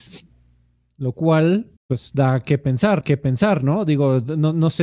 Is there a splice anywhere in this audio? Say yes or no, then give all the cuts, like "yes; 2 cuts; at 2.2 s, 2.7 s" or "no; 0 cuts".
yes; 2 cuts; at 1.8 s, 3.0 s